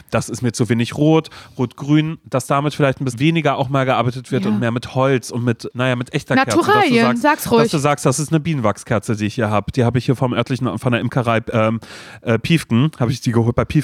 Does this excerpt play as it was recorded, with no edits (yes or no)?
no